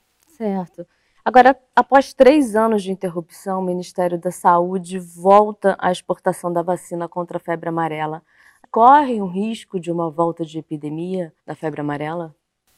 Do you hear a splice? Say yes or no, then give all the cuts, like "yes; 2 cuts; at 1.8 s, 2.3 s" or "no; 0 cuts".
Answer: yes; 2 cuts; at 8.6 s, 11.4 s